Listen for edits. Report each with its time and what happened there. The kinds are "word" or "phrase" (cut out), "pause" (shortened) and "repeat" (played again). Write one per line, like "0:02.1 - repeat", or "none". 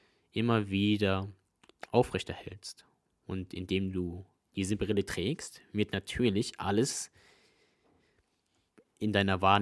none